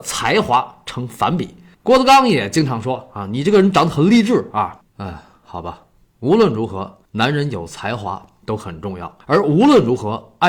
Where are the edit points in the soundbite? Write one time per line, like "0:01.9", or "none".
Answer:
0:01.7
0:04.9
0:06.0
0:07.0
0:09.2

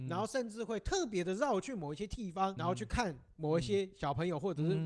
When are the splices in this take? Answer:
0:02.6

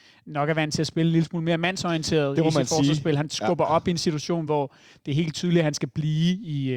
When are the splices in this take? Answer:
none

